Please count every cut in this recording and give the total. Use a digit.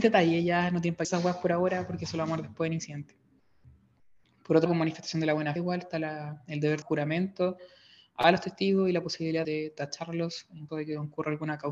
6